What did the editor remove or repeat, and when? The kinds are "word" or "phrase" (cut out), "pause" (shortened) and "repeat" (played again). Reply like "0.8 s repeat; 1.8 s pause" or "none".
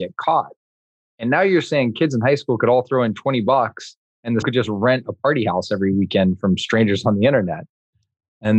4.4 s word